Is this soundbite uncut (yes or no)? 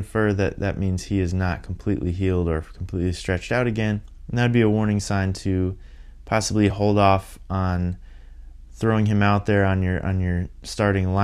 yes